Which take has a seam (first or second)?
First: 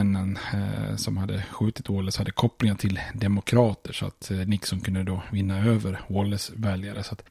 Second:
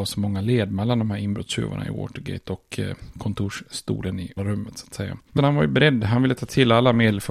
second